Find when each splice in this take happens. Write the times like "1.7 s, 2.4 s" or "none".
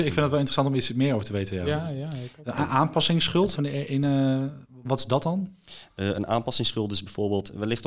3.5 s, 4.8 s